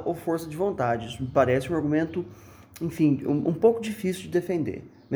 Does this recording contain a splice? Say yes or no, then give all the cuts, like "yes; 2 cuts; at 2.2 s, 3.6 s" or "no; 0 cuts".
no; 0 cuts